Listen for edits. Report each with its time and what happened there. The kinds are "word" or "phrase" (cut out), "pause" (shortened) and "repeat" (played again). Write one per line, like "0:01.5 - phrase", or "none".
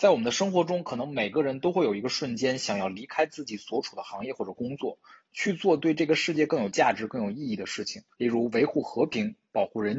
0:08.1 - pause